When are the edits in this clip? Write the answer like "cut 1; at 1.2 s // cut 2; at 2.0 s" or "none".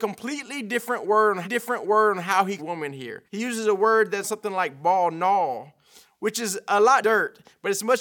cut 1; at 1.4 s // cut 2; at 2.6 s // cut 3; at 3.3 s // cut 4; at 4.2 s // cut 5; at 7.0 s